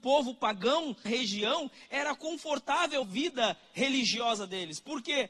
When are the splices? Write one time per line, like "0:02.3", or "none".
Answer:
0:01.1
0:03.0